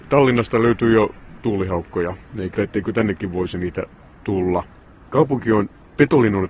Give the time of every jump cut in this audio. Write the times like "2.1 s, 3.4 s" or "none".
1.4 s, 2.6 s